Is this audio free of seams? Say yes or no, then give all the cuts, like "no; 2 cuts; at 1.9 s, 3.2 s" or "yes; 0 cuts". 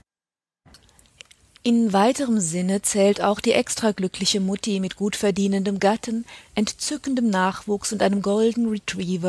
yes; 0 cuts